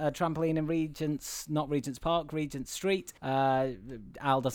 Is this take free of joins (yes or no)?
no